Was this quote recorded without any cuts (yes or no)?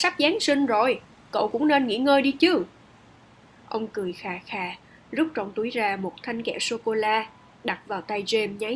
yes